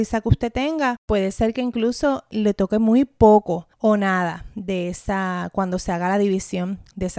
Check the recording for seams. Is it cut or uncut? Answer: cut